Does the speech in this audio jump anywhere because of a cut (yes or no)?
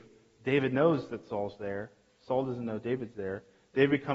no